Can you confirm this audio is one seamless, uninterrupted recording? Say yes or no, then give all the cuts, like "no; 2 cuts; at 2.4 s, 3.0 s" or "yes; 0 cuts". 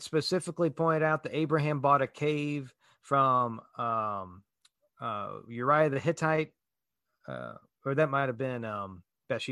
yes; 0 cuts